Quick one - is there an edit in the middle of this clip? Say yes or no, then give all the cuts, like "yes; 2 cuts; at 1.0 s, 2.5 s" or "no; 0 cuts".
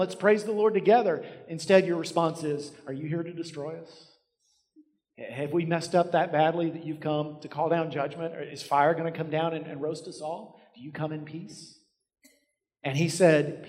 no; 0 cuts